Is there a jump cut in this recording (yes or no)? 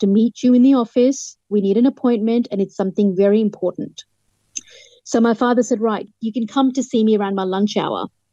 no